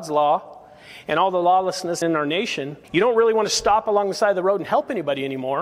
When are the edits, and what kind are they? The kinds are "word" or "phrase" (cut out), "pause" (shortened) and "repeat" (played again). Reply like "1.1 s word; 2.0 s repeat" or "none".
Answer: 2.0 s word; 2.8 s pause